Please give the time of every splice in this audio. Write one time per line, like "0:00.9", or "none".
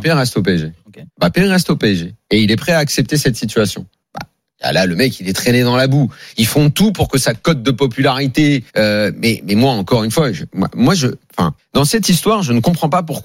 0:01.1
0:04.0
0:08.7
0:11.6